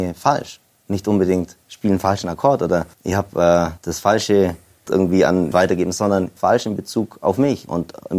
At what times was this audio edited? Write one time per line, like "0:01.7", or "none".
0:01.6
0:02.9
0:03.8
0:04.9
0:05.5
0:06.4